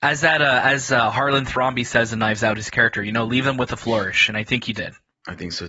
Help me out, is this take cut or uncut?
uncut